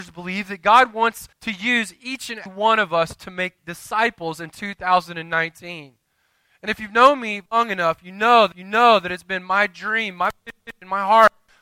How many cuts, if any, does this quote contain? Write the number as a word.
five